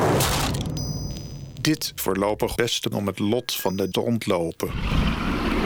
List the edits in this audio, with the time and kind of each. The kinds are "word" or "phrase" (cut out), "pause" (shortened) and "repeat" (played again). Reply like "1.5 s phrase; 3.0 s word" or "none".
2.0 s word; 2.6 s word; 2.9 s word; 3.9 s word